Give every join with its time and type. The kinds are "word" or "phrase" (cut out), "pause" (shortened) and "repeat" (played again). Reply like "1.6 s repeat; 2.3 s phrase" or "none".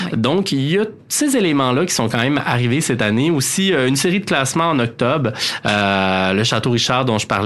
none